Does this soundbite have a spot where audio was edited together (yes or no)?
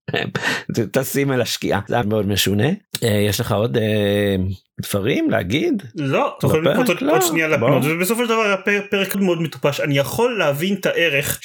yes